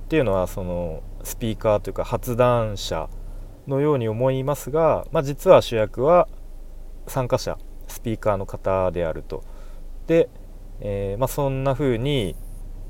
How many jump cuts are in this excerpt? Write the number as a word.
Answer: one